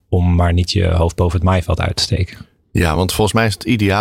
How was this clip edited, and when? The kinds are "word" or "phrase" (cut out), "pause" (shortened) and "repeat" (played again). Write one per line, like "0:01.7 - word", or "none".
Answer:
none